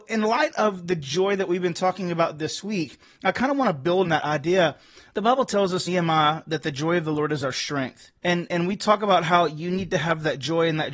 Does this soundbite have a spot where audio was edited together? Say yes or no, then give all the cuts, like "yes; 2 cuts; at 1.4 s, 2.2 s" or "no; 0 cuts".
yes; 2 cuts; at 4.0 s, 5.9 s